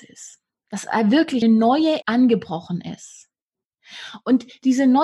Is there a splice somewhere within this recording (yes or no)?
yes